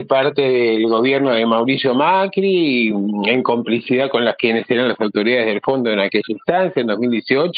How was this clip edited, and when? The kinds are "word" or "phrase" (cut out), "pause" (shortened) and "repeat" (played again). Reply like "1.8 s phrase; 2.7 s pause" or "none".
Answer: none